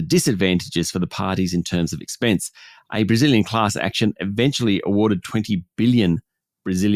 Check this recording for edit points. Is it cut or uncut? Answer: uncut